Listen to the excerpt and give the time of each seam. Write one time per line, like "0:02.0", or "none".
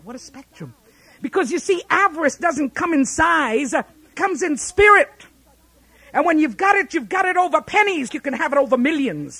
0:04.1
0:08.1